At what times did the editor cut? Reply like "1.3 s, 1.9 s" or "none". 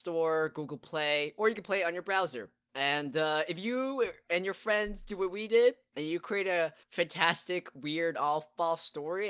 6.8 s